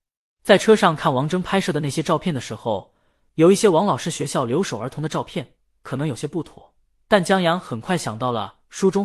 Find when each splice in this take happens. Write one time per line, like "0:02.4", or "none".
none